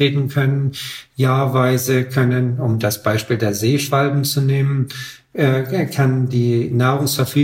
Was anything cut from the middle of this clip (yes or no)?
no